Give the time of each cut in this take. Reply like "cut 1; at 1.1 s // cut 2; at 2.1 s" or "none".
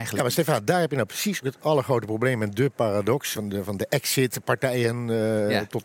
cut 1; at 1.4 s // cut 2; at 3.3 s